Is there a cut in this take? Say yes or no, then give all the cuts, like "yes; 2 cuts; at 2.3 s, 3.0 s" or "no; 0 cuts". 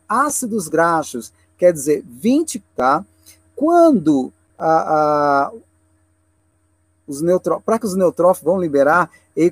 yes; 2 cuts; at 2.6 s, 7.8 s